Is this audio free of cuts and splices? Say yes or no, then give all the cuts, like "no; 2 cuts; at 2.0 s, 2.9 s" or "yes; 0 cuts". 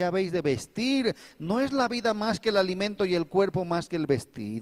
yes; 0 cuts